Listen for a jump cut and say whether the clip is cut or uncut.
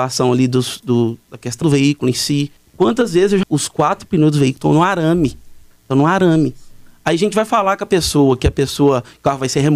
cut